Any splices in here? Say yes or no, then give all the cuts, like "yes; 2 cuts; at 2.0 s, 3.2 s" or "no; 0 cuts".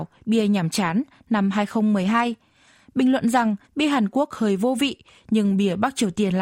yes; 1 cut; at 3.7 s